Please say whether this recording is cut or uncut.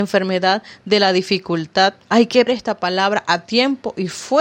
cut